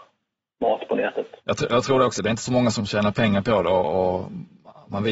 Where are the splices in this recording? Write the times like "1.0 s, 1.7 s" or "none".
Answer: 1.4 s